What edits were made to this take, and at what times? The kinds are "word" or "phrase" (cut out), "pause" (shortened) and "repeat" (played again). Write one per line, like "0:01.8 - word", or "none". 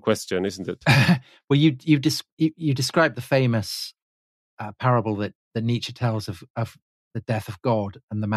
none

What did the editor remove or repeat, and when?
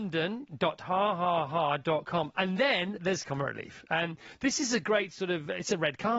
none

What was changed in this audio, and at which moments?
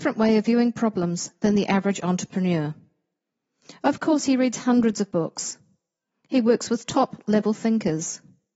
none

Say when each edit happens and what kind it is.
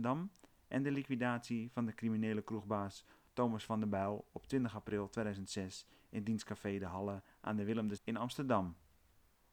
0:08.0 - word

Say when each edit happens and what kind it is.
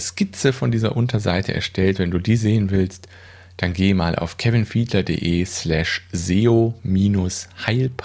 none

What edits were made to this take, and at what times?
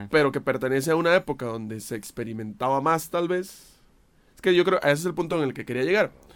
none

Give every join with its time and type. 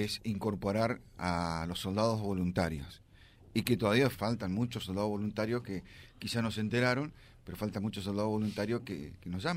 0:04.1 - word

